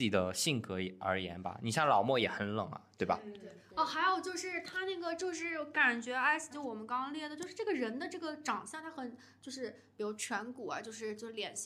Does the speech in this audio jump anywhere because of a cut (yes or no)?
yes